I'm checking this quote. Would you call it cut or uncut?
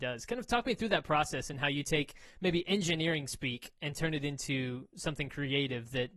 uncut